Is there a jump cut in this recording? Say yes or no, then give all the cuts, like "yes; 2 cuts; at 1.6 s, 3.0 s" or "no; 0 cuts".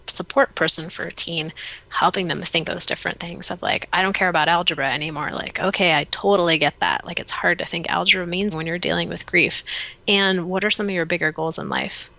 yes; 2 cuts; at 2.6 s, 8.5 s